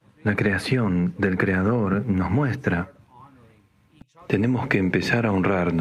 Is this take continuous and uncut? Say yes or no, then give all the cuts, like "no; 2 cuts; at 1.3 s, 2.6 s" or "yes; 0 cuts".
yes; 0 cuts